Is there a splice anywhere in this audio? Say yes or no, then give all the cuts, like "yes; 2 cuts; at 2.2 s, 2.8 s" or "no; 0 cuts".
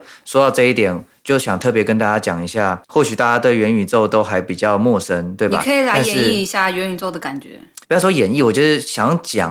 yes; 2 cuts; at 2.8 s, 7.8 s